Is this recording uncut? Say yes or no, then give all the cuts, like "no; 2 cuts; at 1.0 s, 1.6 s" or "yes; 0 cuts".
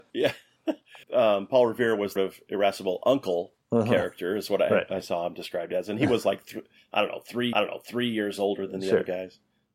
no; 3 cuts; at 1.0 s, 2.2 s, 7.5 s